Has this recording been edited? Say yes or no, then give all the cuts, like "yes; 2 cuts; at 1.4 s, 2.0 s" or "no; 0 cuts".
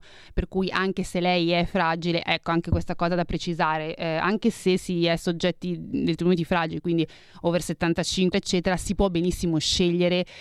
yes; 1 cut; at 8.3 s